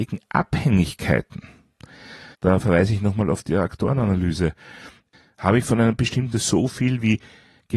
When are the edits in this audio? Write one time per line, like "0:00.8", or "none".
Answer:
0:02.3
0:06.3